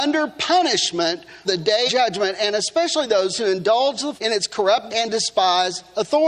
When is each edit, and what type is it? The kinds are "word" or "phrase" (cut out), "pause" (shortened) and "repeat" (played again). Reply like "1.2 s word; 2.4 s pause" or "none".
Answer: 1.4 s word; 1.9 s word; 4.2 s word; 4.9 s word